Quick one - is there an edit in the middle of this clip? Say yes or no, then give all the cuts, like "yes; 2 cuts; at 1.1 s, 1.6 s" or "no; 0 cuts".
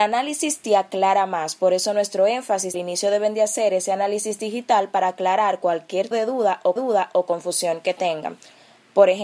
yes; 3 cuts; at 2.7 s, 6.1 s, 6.8 s